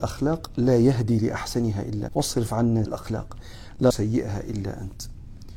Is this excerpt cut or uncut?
cut